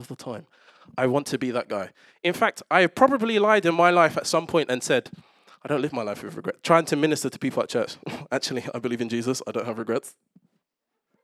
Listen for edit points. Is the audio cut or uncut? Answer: uncut